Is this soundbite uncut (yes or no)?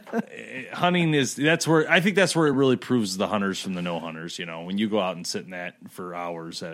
yes